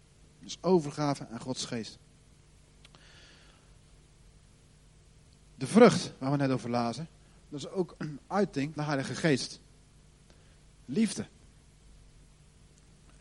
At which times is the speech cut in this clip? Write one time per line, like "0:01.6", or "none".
0:08.0
0:08.8

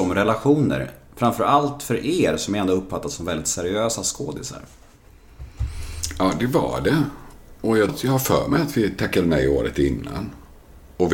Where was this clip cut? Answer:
0:07.9

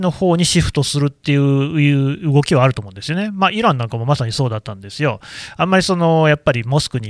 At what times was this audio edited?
none

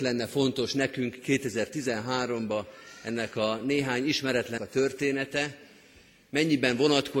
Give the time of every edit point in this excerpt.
0:04.6

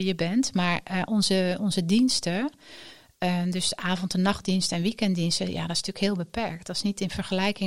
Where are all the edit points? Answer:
none

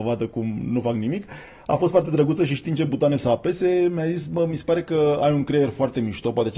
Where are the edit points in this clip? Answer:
none

